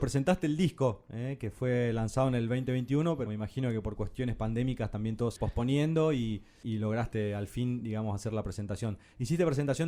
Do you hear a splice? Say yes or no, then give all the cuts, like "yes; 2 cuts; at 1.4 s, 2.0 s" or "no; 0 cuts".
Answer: yes; 3 cuts; at 3.3 s, 5.4 s, 6.6 s